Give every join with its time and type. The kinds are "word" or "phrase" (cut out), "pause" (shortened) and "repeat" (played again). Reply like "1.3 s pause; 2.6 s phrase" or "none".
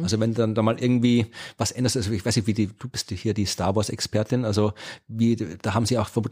none